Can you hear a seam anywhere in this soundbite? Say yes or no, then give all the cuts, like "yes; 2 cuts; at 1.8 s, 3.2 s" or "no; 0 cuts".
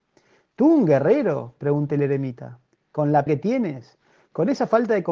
yes; 2 cuts; at 1.9 s, 3.3 s